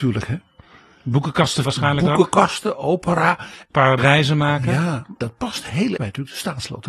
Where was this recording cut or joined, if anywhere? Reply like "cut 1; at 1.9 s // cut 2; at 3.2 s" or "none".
cut 1; at 1.7 s // cut 2; at 4.0 s // cut 3; at 5.2 s // cut 4; at 6.0 s